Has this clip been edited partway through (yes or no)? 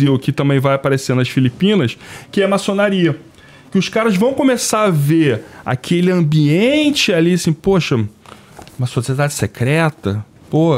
no